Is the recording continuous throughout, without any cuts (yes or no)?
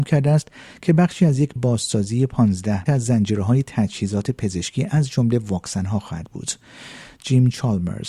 no